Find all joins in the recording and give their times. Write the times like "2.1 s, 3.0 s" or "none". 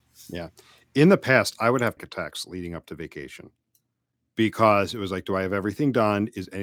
2.0 s